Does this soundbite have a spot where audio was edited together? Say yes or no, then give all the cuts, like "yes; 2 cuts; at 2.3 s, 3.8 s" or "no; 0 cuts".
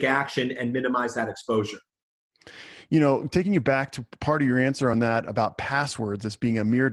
no; 0 cuts